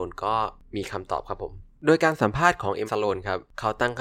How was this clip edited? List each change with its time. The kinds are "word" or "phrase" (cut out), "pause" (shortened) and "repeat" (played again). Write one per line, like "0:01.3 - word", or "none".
0:02.9 - word